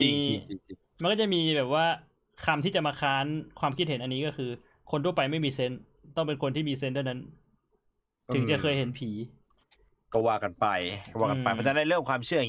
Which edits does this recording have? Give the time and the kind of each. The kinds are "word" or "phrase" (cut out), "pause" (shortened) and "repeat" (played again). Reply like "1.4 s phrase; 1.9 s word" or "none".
none